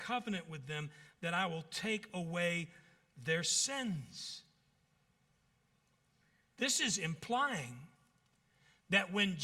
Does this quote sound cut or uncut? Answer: uncut